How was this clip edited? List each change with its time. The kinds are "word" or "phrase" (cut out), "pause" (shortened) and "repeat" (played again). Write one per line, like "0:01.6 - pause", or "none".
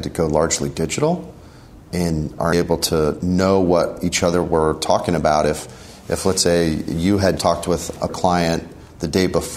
0:02.5 - phrase
0:07.4 - word
0:08.1 - word